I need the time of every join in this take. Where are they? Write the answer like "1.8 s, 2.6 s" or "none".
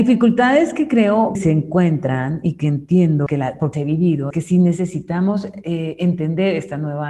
1.3 s, 3.3 s, 3.7 s, 4.3 s